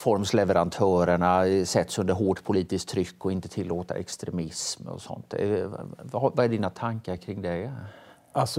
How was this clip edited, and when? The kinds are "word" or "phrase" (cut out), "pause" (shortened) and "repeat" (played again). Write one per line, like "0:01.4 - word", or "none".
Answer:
none